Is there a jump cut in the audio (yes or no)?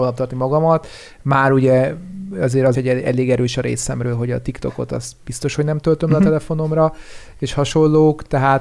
yes